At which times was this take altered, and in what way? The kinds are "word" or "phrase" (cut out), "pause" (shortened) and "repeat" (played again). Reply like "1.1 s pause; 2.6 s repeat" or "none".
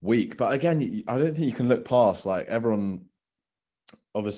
none